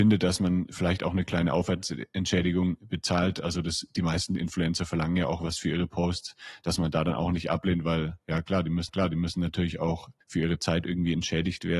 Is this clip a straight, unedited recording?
no; 2 cuts; at 8.9 s, 10.2 s

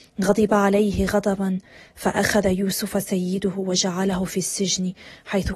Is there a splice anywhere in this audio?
no; 0 cuts

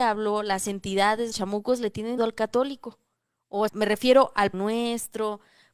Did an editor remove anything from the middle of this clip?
yes; 4 cuts; at 1.3 s, 2.2 s, 3.7 s, 4.5 s

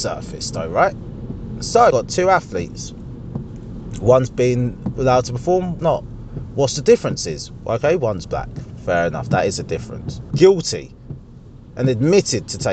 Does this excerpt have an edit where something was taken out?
yes; 5 cuts; at 1.9 s, 4.9 s, 5.8 s, 8.2 s, 10.3 s

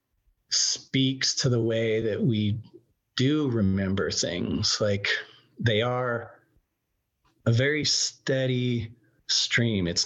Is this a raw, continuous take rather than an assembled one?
yes; 0 cuts

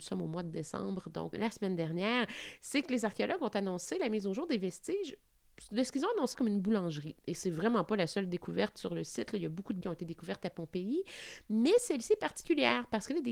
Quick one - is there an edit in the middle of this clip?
yes; 3 cuts; at 1.3 s, 6.3 s, 9.8 s

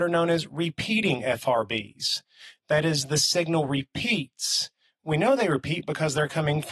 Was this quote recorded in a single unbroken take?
yes; 0 cuts

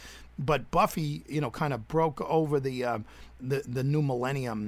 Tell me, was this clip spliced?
yes; 2 cuts; at 1.3 s, 3.4 s

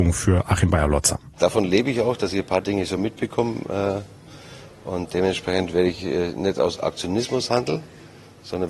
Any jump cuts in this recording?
no; 0 cuts

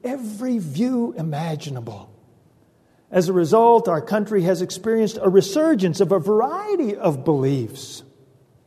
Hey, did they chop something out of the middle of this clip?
no; 0 cuts

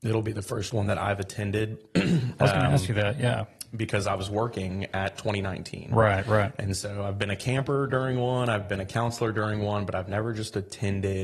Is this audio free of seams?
yes; 0 cuts

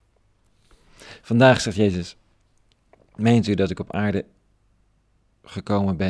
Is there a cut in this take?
no; 0 cuts

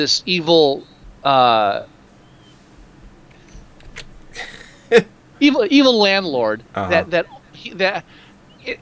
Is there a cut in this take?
yes; 1 cut; at 6.7 s

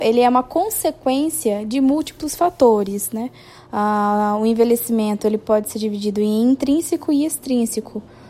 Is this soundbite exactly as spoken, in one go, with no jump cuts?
yes; 0 cuts

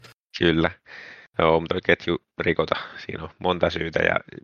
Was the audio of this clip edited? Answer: yes; 2 cuts; at 1.3 s, 1.7 s

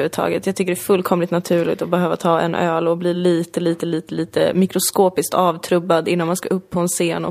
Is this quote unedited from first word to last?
yes; 0 cuts

